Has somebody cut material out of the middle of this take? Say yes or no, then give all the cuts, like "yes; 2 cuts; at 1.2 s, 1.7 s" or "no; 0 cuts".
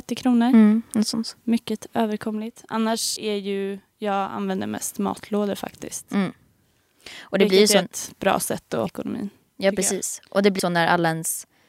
yes; 4 cuts; at 1.4 s, 3.2 s, 8.9 s, 10.6 s